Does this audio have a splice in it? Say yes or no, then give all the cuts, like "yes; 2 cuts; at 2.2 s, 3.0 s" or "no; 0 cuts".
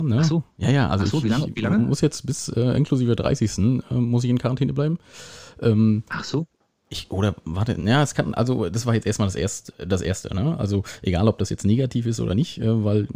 no; 0 cuts